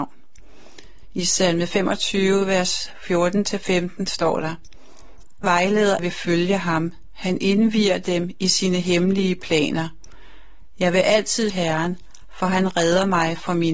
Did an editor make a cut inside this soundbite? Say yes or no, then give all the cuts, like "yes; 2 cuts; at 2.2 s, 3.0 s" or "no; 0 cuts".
yes; 3 cuts; at 5.4 s, 6.0 s, 11.5 s